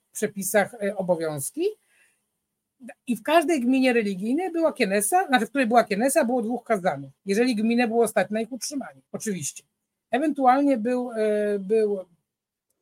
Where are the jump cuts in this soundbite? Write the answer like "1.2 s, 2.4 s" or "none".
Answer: 3.0 s, 7.2 s, 9.1 s